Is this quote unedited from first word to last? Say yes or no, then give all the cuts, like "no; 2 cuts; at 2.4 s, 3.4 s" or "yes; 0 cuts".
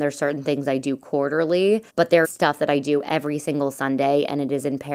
no; 2 cuts; at 1.9 s, 2.2 s